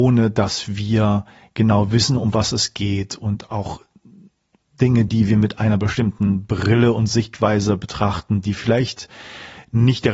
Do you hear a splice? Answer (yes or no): no